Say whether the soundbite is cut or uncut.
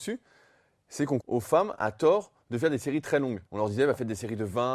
cut